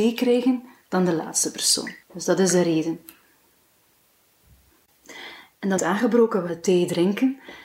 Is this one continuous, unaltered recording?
no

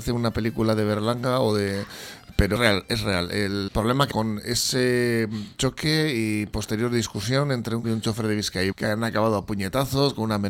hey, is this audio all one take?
no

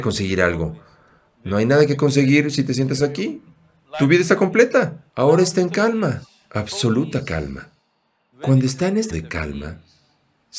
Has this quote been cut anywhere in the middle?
yes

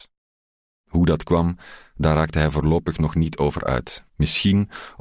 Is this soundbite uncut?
no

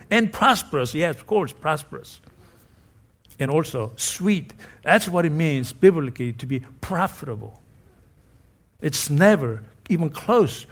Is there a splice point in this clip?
no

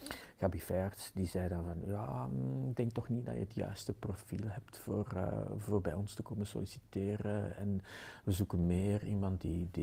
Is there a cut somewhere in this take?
no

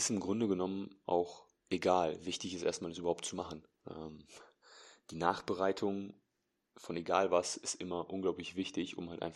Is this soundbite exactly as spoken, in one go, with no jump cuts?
yes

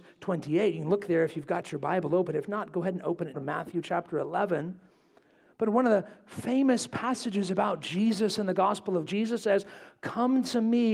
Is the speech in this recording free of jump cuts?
no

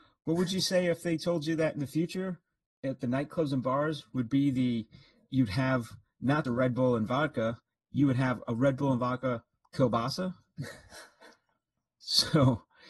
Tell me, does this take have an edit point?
yes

